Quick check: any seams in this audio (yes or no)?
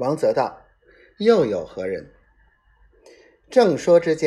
no